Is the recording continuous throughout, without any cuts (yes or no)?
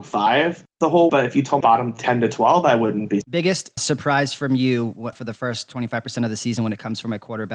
no